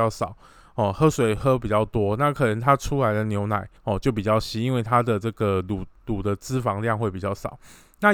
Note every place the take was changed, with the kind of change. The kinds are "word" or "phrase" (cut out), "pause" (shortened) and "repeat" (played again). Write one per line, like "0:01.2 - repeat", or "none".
0:03.8 - pause